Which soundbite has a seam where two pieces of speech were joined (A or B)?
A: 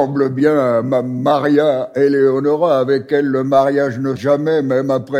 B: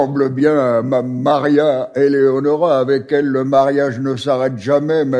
A